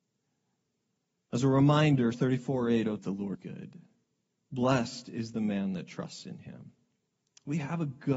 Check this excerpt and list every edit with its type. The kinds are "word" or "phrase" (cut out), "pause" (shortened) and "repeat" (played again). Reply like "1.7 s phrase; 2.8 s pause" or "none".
2.1 s word; 3.0 s phrase; 3.3 s word

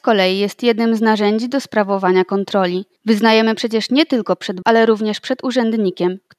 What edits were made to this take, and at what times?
3.0 s pause; 4.6 s word

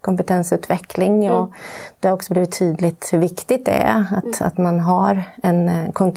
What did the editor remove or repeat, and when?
none

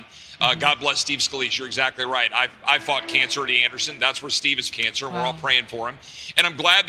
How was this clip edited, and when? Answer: 3.4 s word; 4.7 s word

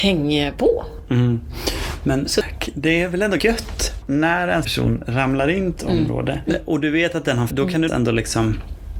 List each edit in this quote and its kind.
3.4 s word; 4.0 s word; 4.6 s word; 5.8 s word; 7.5 s word; 7.9 s word

